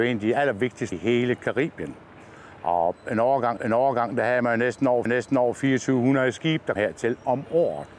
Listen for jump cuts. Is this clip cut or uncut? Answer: cut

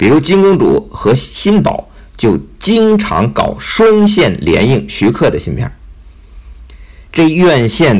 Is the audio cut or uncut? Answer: cut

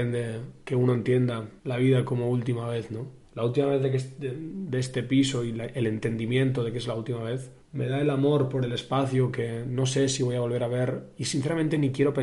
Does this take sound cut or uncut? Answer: cut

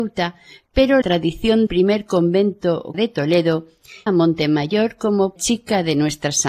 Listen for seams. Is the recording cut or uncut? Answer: cut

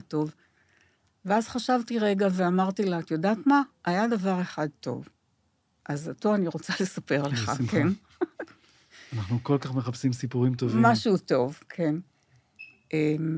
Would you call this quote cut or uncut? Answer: uncut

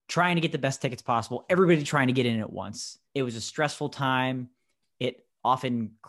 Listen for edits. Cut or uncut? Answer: cut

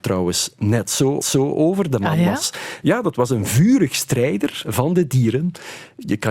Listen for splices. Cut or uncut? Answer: cut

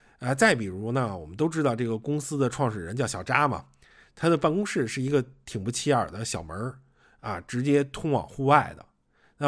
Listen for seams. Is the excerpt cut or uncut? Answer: uncut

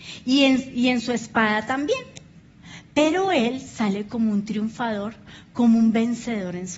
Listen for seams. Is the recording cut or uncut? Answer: uncut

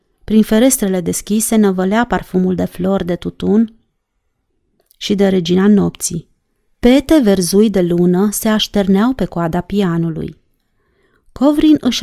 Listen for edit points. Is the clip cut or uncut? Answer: uncut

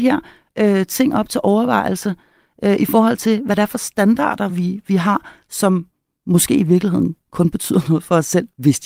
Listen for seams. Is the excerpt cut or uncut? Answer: uncut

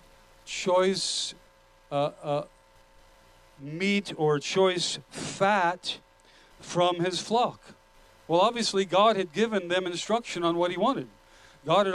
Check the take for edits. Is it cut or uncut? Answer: uncut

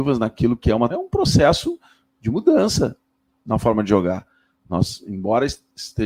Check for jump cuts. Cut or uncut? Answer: cut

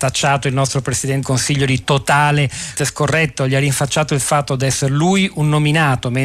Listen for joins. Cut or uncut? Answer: cut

